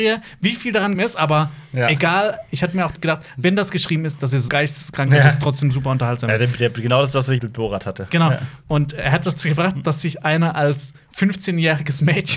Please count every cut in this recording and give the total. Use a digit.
4